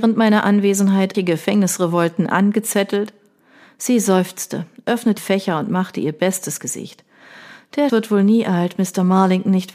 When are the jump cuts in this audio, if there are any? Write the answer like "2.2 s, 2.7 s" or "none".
1.1 s, 5.2 s, 6.6 s, 7.9 s